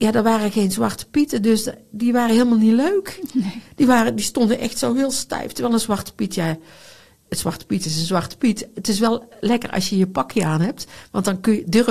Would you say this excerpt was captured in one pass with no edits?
yes; 0 cuts

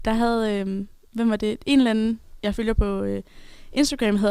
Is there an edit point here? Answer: no; 0 cuts

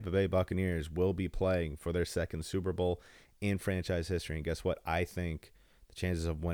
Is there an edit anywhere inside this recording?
no; 0 cuts

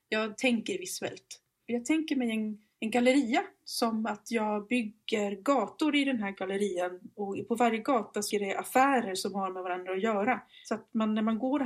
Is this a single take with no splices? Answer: no; 1 cut; at 8.3 s

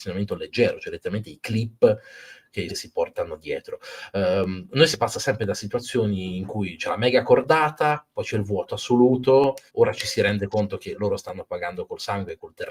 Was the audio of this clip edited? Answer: yes; 2 cuts; at 2.7 s, 9.7 s

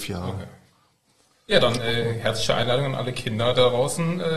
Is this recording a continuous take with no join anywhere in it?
yes; 0 cuts

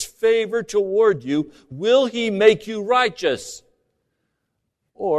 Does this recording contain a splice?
no; 0 cuts

